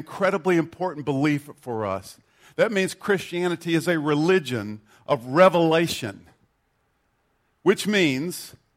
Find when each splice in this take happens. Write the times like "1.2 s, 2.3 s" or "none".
none